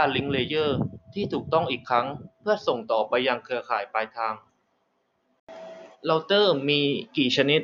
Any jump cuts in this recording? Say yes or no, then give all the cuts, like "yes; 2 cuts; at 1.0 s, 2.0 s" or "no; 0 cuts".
yes; 1 cut; at 5.9 s